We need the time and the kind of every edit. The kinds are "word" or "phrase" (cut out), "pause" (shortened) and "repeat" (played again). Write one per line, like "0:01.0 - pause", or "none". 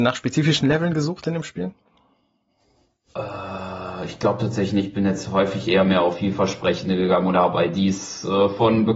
none